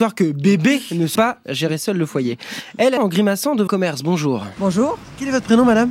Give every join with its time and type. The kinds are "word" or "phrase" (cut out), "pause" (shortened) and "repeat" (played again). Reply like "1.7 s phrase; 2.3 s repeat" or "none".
1.1 s word; 3.0 s word; 3.7 s word